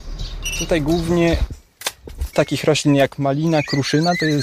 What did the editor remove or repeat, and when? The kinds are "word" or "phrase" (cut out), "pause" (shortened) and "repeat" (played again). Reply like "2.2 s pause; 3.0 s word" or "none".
2.3 s word